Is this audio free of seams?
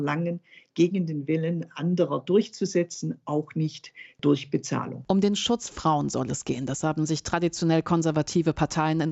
no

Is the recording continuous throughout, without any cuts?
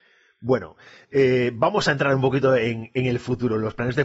yes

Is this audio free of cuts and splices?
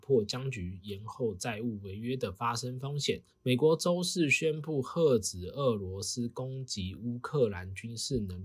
no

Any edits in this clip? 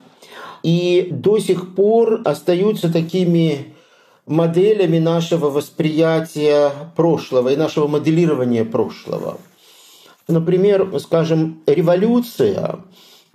no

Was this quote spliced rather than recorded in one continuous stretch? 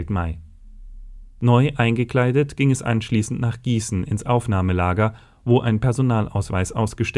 no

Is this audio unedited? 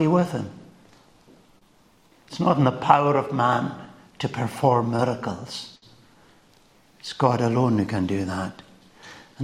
yes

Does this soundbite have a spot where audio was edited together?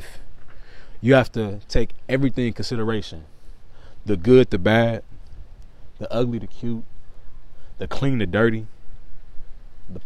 no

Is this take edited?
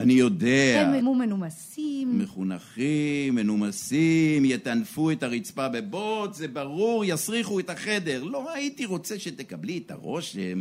yes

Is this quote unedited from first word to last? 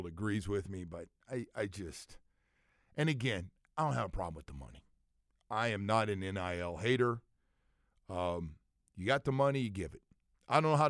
yes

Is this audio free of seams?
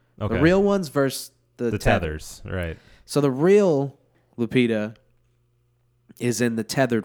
yes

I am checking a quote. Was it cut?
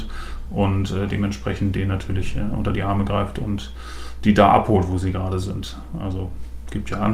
no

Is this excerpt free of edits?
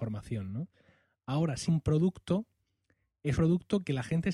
no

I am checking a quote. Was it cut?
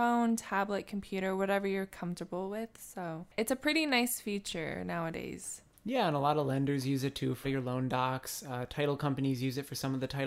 yes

